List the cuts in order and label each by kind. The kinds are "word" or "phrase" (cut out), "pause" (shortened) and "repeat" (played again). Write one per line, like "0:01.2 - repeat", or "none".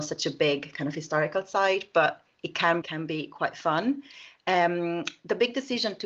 0:02.8 - phrase